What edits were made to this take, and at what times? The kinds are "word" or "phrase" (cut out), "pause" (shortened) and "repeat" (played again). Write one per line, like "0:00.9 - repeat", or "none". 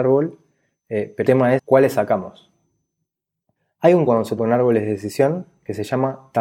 0:01.2 - word
0:01.6 - word
0:04.1 - word
0:04.4 - word